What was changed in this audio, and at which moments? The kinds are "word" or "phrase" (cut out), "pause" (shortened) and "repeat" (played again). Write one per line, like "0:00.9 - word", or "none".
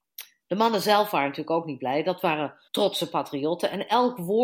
0:02.7 - pause